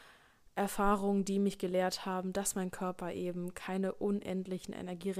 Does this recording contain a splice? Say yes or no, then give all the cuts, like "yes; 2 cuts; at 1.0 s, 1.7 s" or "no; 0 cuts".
no; 0 cuts